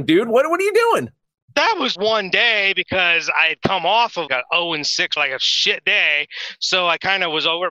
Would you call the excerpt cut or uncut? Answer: cut